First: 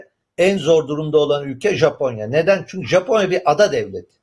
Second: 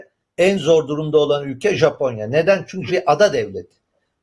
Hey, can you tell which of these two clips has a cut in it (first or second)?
second